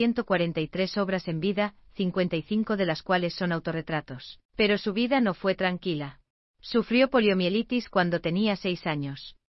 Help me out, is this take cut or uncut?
cut